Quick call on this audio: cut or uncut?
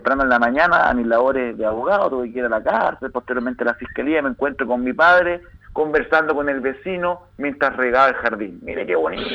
uncut